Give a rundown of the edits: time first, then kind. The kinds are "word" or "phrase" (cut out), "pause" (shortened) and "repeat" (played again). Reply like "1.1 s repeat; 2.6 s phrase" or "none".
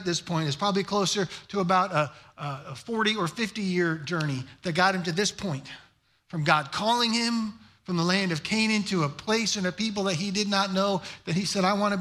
none